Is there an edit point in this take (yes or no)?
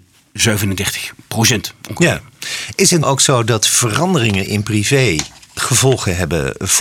yes